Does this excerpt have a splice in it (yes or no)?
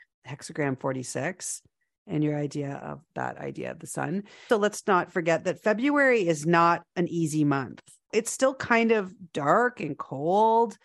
yes